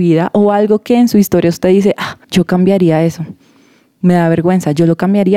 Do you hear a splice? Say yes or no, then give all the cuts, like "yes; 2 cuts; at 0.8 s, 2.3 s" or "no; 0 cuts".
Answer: yes; 1 cut; at 2.2 s